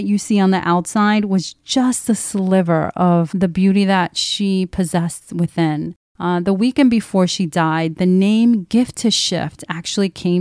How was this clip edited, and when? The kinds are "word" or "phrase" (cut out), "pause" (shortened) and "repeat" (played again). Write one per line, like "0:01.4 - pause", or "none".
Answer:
none